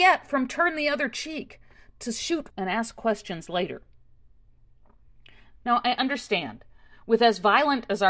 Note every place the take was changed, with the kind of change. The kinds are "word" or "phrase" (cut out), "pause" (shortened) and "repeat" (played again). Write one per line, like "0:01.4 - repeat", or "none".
0:02.5 - word